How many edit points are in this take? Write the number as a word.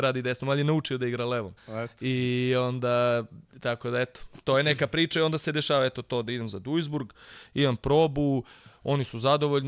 two